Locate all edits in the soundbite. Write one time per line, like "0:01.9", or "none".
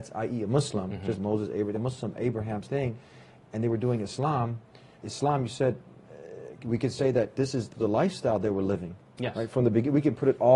0:01.2
0:01.7
0:02.6
0:05.0
0:07.7